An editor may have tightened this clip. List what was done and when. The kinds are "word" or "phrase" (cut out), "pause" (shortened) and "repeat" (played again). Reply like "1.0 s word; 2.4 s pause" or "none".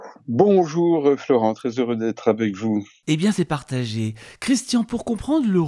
none